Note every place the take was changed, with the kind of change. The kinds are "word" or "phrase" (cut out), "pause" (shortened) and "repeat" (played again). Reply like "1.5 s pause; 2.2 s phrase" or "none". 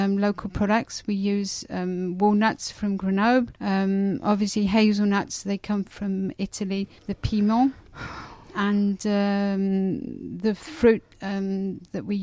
3.6 s pause; 7.0 s pause; 8.4 s pause